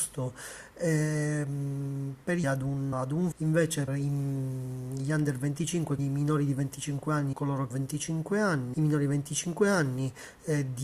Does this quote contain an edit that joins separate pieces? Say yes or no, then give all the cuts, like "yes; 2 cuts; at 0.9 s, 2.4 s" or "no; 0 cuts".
yes; 8 cuts; at 2.4 s, 2.9 s, 3.3 s, 3.9 s, 6.0 s, 7.3 s, 7.7 s, 8.7 s